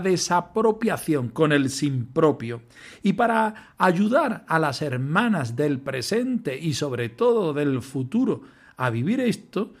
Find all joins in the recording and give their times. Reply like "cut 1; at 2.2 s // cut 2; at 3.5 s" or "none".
none